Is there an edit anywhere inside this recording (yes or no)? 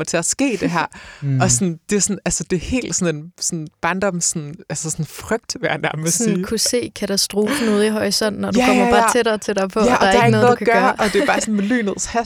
no